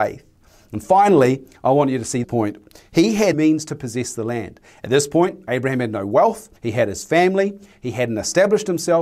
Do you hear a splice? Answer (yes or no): yes